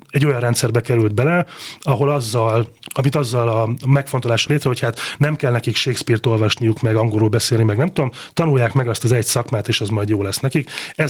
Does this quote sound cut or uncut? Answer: cut